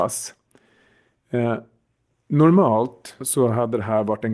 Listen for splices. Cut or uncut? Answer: cut